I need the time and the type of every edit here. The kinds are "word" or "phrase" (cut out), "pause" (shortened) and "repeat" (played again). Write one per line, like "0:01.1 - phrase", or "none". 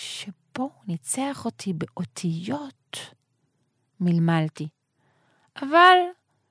none